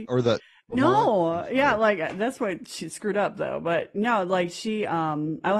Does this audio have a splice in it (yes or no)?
no